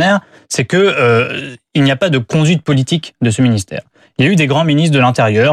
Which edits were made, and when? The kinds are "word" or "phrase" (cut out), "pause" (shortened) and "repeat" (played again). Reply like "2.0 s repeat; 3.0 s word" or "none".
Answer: none